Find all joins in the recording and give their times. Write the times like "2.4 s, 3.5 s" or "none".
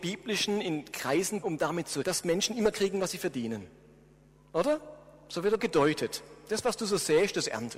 0.9 s, 1.4 s, 2.0 s, 2.7 s, 5.6 s